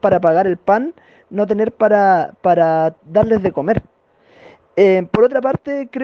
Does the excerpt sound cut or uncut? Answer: uncut